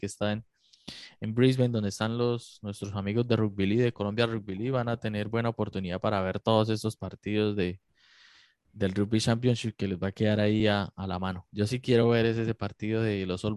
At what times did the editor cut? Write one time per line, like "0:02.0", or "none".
none